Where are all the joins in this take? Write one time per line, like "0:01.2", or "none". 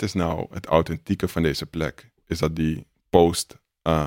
0:02.2